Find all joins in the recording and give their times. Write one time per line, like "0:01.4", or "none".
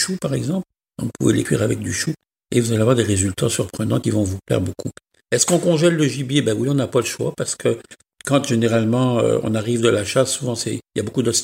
none